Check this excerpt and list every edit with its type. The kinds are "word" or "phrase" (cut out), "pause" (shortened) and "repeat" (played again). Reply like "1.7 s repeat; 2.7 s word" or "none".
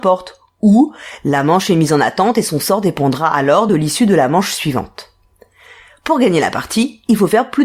none